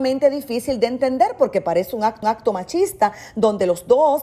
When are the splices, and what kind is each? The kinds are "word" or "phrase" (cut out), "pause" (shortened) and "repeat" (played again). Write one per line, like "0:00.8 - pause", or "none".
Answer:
0:02.2 - repeat